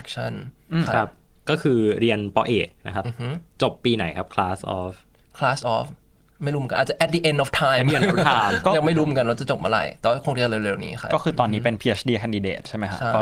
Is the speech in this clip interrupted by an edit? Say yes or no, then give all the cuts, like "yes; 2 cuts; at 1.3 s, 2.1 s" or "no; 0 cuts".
no; 0 cuts